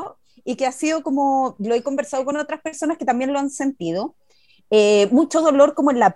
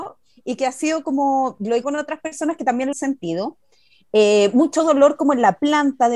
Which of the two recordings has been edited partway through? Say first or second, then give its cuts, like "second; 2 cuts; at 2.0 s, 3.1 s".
second; 2 cuts; at 1.8 s, 2.9 s